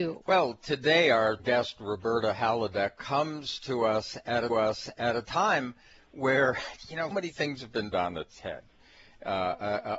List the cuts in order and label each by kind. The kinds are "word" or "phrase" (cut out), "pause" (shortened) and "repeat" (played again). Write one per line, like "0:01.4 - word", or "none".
0:01.4 - word
0:04.5 - repeat
0:07.1 - word
0:07.9 - word